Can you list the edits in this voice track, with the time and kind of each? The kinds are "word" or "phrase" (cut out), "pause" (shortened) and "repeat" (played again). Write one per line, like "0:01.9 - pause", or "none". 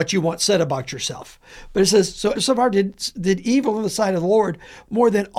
0:02.3 - word